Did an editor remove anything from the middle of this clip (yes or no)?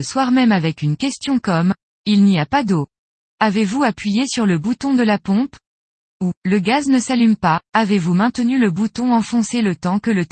no